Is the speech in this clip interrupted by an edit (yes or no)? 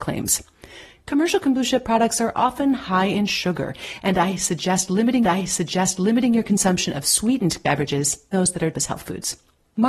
yes